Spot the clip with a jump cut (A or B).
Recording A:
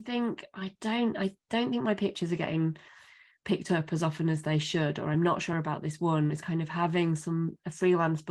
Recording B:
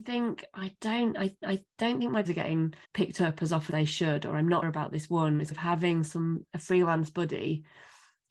B